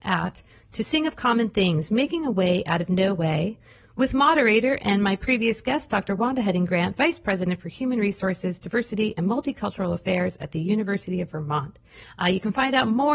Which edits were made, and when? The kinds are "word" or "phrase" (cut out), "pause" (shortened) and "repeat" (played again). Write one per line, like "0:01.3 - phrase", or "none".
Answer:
none